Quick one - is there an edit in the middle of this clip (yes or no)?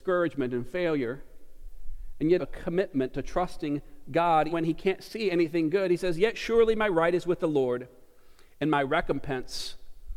yes